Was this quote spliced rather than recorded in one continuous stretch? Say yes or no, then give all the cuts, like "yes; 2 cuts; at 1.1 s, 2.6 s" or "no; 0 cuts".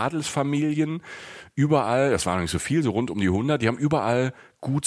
no; 0 cuts